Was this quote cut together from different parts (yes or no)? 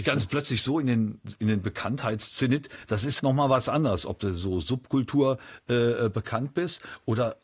yes